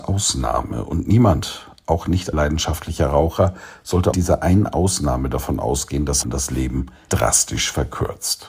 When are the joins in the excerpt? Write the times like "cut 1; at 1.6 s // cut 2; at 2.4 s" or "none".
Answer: cut 1; at 2.3 s // cut 2; at 4.1 s // cut 3; at 6.2 s // cut 4; at 7.1 s

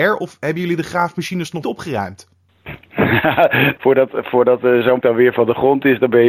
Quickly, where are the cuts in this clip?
cut 1; at 1.6 s // cut 2; at 3.8 s // cut 3; at 5.0 s

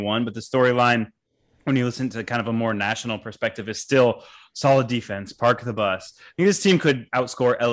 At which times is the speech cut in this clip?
none

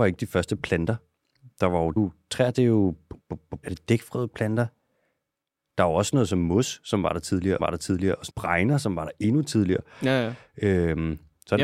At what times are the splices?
cut 1; at 2.0 s // cut 2; at 3.6 s // cut 3; at 7.6 s // cut 4; at 8.3 s

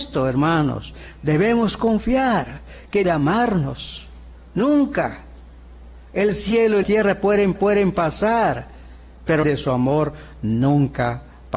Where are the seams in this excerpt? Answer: cut 1; at 3.0 s // cut 2; at 6.8 s // cut 3; at 7.5 s // cut 4; at 9.4 s

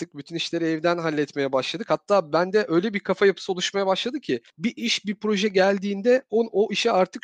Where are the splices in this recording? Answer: cut 1; at 4.5 s

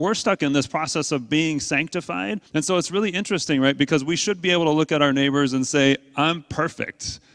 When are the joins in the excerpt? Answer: cut 1; at 2.5 s

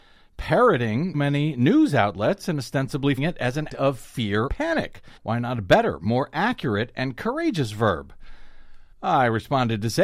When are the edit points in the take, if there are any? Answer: cut 1; at 1.1 s // cut 2; at 3.2 s // cut 3; at 3.7 s // cut 4; at 4.5 s // cut 5; at 5.2 s // cut 6; at 8.9 s

